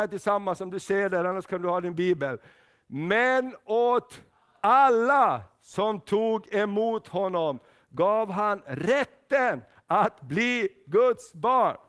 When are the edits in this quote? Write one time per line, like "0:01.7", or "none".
none